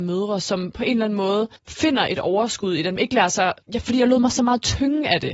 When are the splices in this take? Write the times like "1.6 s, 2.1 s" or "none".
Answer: 1.6 s, 3.0 s, 3.6 s